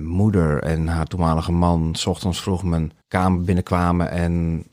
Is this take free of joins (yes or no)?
no